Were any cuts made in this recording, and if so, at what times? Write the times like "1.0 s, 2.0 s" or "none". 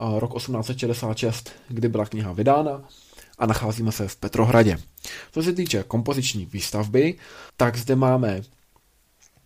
7.5 s